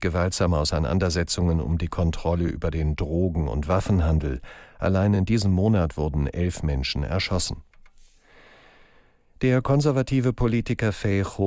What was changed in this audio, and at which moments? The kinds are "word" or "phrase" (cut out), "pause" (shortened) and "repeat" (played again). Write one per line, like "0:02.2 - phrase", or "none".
none

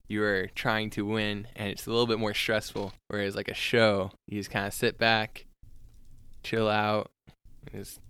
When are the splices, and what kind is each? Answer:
0:03.0 - pause
0:04.2 - pause

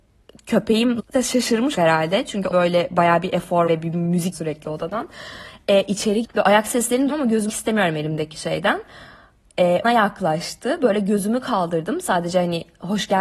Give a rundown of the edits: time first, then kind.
0:01.0 - word
0:01.7 - word
0:02.5 - word
0:03.7 - word
0:04.3 - word
0:06.2 - word
0:07.1 - word
0:07.5 - word
0:09.8 - word

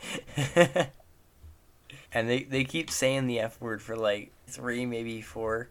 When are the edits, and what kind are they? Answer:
0:02.0 - pause
0:04.5 - word

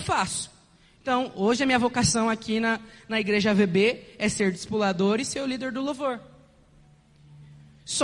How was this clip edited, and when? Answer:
none

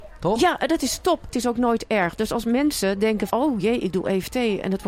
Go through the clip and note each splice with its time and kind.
0:01.3 - word
0:03.3 - word

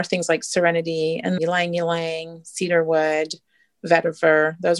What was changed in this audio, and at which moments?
0:01.4 - phrase

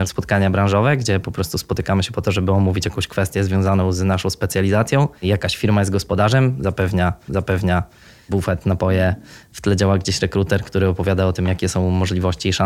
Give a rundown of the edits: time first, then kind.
0:05.2 - pause
0:07.3 - repeat

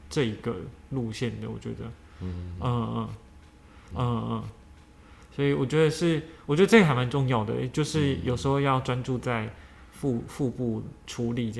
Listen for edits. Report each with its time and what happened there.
0:03.9 - repeat

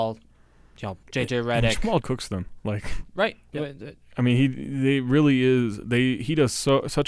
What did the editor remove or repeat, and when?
0:01.0 - pause
0:02.0 - word

